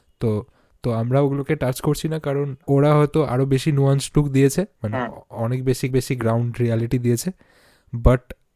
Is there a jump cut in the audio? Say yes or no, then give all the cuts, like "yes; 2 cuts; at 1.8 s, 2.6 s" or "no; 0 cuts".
yes; 1 cut; at 5.9 s